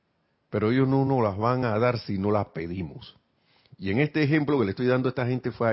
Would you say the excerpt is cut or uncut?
uncut